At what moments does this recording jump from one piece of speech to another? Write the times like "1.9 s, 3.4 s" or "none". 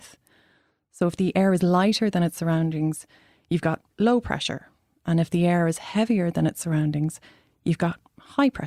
none